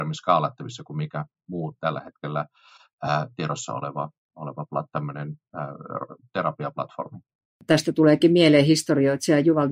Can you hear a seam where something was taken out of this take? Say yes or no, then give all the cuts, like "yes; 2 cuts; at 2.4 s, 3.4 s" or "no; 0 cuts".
no; 0 cuts